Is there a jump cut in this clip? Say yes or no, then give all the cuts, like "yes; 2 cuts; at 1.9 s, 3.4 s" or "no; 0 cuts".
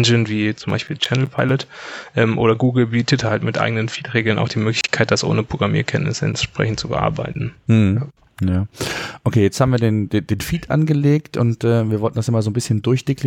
no; 0 cuts